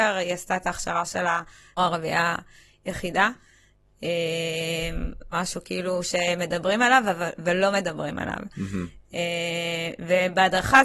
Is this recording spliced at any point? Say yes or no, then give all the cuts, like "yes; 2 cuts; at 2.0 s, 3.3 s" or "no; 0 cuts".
yes; 2 cuts; at 1.8 s, 5.3 s